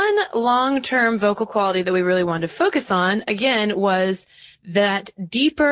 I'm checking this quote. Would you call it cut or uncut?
uncut